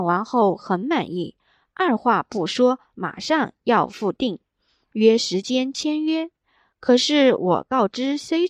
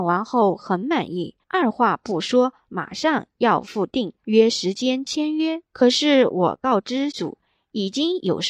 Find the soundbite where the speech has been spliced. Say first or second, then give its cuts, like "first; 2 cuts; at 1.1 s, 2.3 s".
second; 4 cuts; at 1.4 s, 4.2 s, 5.7 s, 7.1 s